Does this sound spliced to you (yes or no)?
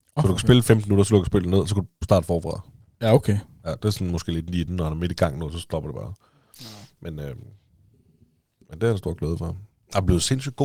no